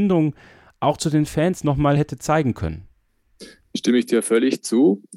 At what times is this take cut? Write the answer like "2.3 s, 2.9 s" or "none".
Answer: none

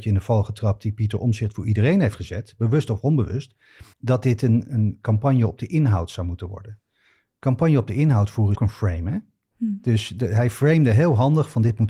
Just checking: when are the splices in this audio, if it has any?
3.9 s, 4.6 s, 8.5 s

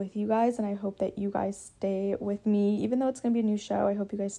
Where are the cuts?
none

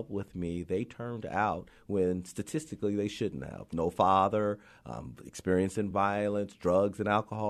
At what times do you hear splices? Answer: none

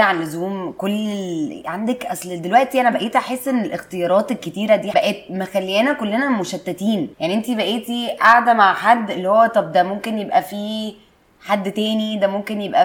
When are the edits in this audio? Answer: 7.1 s

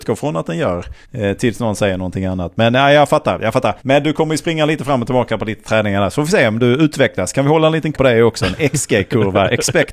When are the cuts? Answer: 1.0 s, 3.8 s, 7.9 s

